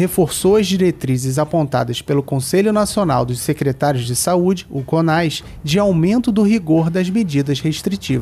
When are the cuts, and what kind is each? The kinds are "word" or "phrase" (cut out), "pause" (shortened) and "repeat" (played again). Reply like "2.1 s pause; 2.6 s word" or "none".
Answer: none